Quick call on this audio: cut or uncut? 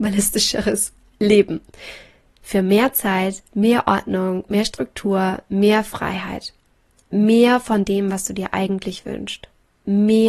uncut